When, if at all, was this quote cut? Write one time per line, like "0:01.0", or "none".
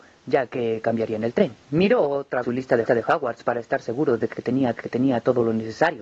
0:01.6
0:02.4
0:02.8
0:04.7